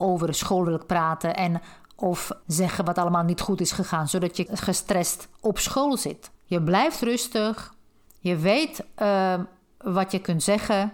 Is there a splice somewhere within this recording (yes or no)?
yes